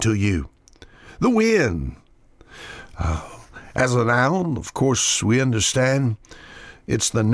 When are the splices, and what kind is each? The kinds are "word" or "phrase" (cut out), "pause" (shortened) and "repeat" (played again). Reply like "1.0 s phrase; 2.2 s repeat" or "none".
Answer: none